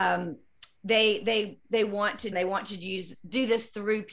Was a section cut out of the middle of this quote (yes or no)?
yes